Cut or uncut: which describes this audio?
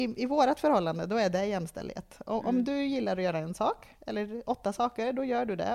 uncut